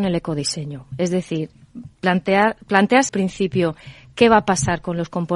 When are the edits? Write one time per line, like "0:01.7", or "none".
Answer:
0:03.1